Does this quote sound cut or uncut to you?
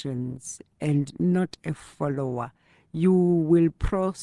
uncut